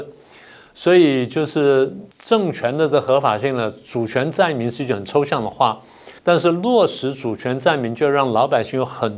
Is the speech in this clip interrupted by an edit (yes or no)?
yes